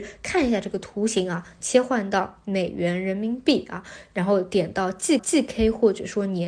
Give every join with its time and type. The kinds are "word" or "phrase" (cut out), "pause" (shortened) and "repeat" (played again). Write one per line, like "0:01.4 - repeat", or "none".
0:05.2 - repeat